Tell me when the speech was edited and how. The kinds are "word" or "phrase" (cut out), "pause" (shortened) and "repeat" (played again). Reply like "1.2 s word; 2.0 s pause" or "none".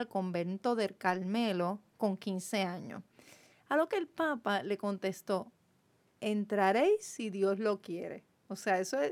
none